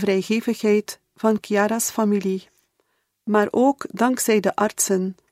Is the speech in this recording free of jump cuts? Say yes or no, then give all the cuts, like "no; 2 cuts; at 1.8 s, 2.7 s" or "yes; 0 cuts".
yes; 0 cuts